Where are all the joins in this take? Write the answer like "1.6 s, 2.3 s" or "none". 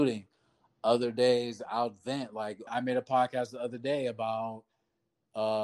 2.7 s